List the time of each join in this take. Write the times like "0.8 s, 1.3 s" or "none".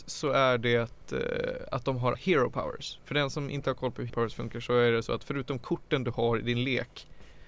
2.1 s, 4.1 s